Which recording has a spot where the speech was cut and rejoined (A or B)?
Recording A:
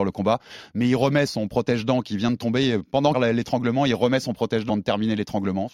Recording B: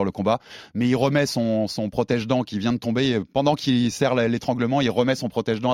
A